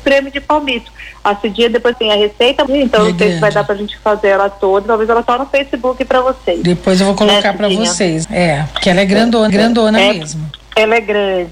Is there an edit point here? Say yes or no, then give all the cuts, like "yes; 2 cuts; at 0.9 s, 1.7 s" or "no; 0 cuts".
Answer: yes; 6 cuts; at 1.9 s, 2.7 s, 5.2 s, 8.2 s, 9.5 s, 10.6 s